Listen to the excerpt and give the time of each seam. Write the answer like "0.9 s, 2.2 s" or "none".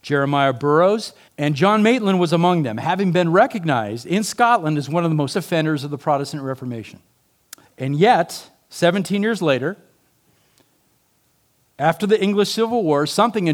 1.3 s, 5.3 s, 7.2 s